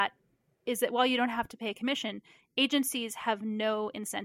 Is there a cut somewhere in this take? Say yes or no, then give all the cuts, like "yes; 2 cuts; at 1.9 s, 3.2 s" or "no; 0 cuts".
no; 0 cuts